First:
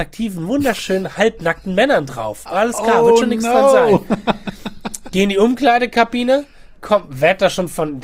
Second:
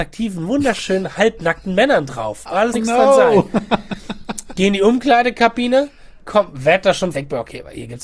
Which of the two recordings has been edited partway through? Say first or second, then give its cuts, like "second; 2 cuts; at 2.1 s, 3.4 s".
second; 2 cuts; at 2.7 s, 7.1 s